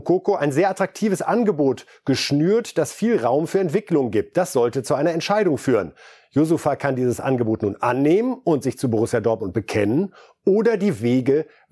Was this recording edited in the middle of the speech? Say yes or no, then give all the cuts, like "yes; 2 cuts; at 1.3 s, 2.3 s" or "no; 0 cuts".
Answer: no; 0 cuts